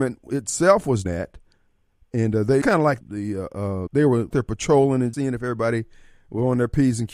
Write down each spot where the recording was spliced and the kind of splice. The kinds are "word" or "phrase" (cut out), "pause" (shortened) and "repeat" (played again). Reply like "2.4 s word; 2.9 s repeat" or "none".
1.1 s word; 2.6 s word; 3.0 s word; 3.9 s word; 4.3 s word; 5.1 s word

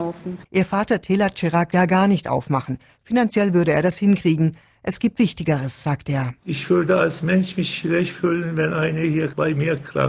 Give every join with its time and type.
1.7 s phrase

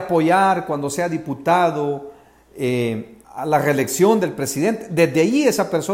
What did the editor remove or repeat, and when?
3.2 s pause

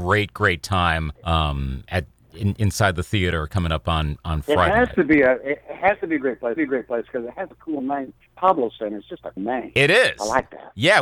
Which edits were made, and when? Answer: 1.2 s pause; 6.6 s repeat; 9.4 s word

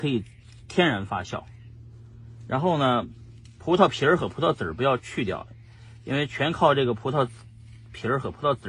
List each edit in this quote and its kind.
none

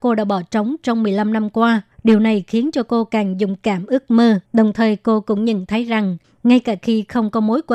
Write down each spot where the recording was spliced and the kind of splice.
1.9 s pause; 4.5 s pause

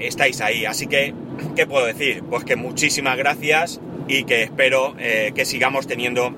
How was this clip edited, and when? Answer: none

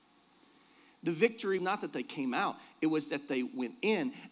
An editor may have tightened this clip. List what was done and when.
1.6 s word

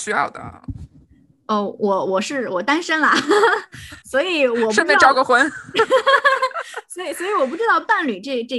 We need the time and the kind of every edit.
4.0 s pause

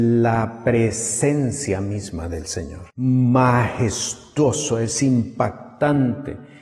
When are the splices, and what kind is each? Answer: 2.9 s pause

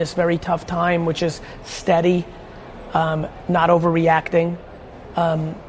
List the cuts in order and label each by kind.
none

